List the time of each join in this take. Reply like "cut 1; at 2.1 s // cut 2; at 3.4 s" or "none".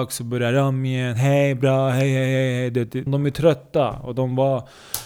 cut 1; at 3.1 s